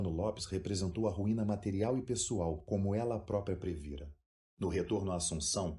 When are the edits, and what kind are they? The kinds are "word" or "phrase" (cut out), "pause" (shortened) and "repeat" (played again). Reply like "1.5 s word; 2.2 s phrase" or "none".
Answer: none